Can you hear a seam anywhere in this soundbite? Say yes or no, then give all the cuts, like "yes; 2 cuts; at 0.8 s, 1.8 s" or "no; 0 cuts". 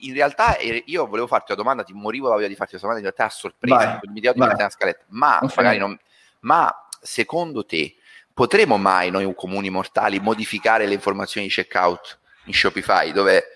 no; 0 cuts